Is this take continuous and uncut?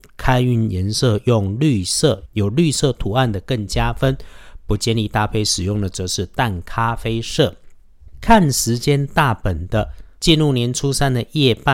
no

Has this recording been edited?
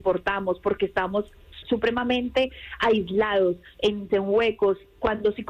yes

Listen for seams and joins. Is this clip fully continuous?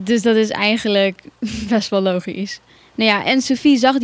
yes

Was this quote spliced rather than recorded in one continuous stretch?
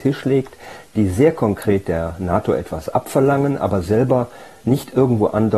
no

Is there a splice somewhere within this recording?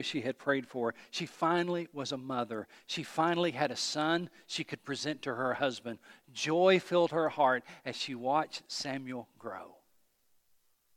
no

